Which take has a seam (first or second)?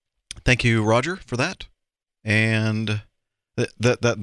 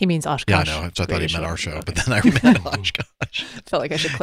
second